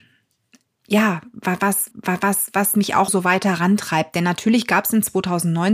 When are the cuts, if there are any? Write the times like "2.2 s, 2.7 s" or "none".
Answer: 1.9 s, 3.1 s

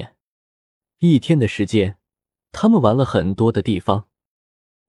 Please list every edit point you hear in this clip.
none

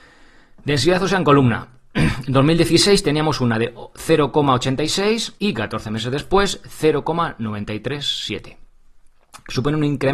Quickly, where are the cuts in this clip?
5.4 s

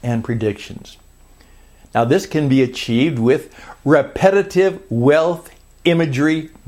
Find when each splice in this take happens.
none

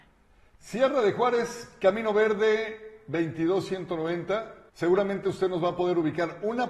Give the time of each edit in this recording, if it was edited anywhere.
4.7 s

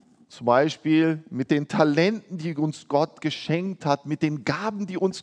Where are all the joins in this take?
none

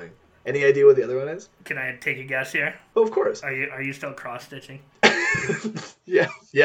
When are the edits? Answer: none

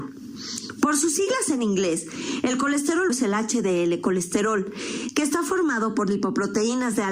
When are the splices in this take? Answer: 3.1 s

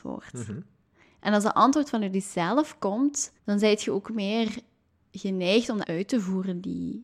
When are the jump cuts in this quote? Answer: 3.4 s, 5.8 s

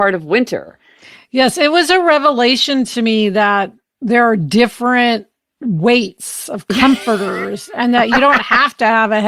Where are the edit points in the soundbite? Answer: none

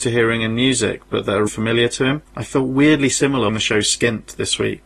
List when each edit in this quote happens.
1.5 s, 2.3 s, 3.5 s

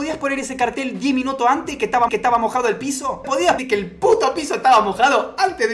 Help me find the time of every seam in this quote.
2.1 s, 3.2 s, 3.6 s

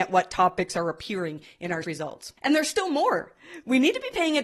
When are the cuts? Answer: 1.8 s

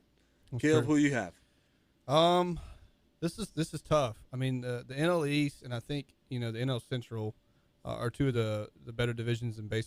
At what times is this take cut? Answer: none

